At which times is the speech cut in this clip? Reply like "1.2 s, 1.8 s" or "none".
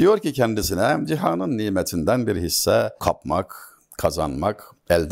none